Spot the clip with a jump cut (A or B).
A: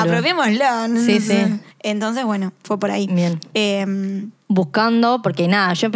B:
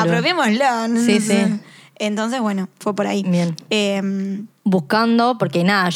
A